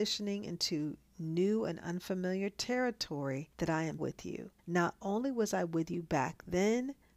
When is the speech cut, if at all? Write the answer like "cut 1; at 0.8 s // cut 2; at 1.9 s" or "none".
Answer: cut 1; at 3.5 s // cut 2; at 4.0 s // cut 3; at 4.6 s